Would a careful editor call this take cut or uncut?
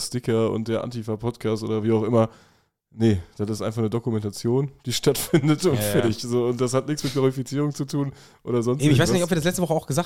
uncut